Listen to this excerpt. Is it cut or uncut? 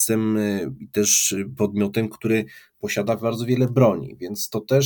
uncut